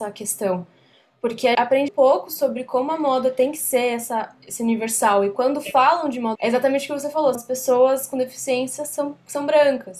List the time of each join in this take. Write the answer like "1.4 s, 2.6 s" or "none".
1.5 s, 1.9 s, 6.4 s, 7.3 s